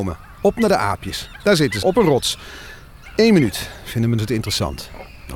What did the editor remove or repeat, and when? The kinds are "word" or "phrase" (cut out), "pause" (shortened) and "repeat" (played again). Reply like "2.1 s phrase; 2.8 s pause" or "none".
1.8 s word; 4.2 s word

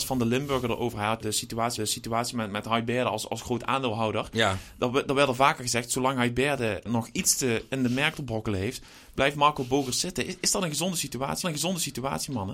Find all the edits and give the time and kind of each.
1.2 s phrase; 1.8 s repeat; 6.9 s word; 11.4 s repeat

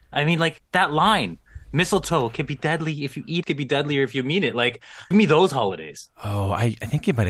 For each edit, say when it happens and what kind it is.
3.4 s phrase; 5.1 s word

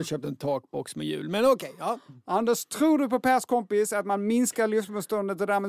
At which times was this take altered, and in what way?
none

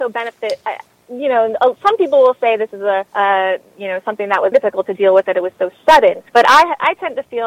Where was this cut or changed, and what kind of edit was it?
3.1 s pause; 4.5 s word; 5.2 s phrase; 6.3 s pause

